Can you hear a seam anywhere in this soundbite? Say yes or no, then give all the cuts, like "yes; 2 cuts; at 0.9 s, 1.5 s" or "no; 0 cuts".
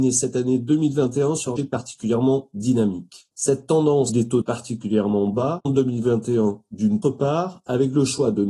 yes; 6 cuts; at 1.6 s, 3.3 s, 4.1 s, 4.4 s, 5.6 s, 7.0 s